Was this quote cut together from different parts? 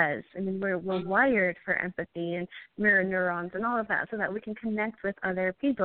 no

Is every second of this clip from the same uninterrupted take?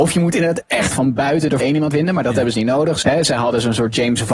no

